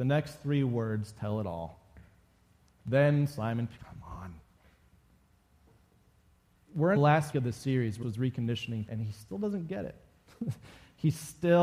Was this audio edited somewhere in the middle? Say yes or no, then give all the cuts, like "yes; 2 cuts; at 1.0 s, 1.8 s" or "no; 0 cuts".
yes; 5 cuts; at 3.8 s, 7.0 s, 7.3 s, 8.0 s, 8.9 s